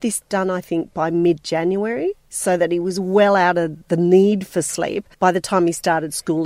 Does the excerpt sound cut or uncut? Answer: cut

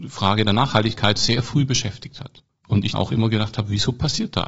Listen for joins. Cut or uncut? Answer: cut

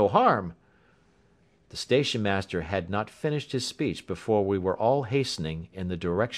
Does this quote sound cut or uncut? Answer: uncut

